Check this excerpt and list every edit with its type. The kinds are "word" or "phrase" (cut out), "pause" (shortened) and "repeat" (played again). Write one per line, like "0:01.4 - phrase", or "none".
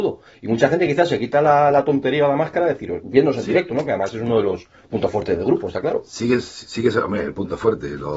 none